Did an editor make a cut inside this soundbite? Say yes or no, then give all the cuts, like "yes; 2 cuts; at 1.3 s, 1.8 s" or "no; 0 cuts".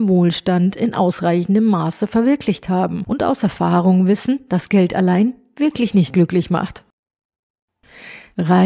no; 0 cuts